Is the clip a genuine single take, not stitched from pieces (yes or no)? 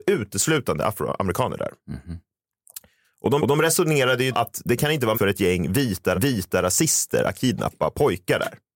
no